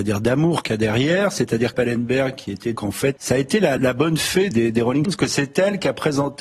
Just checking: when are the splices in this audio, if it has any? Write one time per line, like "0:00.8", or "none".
0:01.7
0:02.8
0:03.2
0:03.8
0:04.5
0:05.0